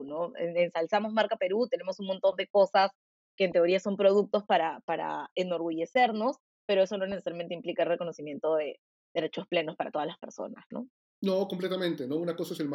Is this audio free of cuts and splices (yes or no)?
yes